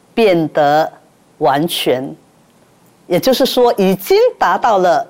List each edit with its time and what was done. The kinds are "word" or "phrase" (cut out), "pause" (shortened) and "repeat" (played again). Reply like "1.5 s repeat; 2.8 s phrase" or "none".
none